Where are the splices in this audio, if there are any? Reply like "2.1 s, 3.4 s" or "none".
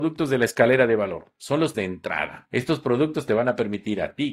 1.7 s